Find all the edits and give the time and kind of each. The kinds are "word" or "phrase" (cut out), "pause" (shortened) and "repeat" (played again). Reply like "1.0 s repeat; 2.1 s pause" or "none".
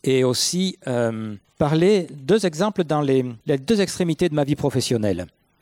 1.4 s pause; 3.4 s pause